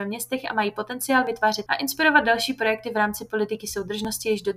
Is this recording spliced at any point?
yes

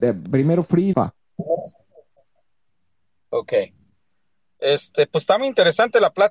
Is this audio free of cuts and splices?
no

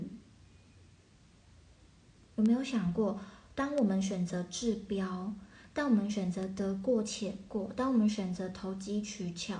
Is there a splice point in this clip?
no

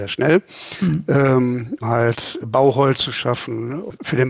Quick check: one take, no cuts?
no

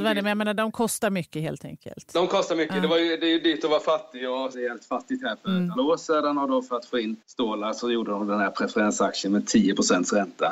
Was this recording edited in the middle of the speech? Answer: yes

